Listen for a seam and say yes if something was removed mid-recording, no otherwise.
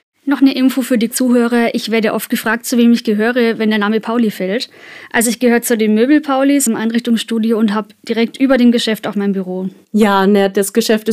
yes